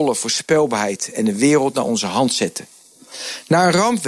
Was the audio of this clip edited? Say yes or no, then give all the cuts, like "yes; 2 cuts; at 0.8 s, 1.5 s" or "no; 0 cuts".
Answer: no; 0 cuts